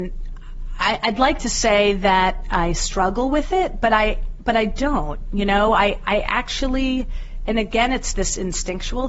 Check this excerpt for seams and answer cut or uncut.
uncut